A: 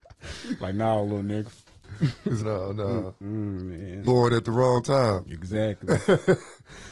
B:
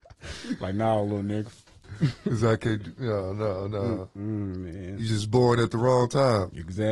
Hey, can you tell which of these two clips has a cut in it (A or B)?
A